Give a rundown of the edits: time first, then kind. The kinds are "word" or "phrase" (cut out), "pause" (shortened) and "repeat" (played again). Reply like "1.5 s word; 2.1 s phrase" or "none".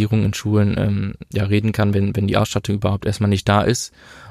none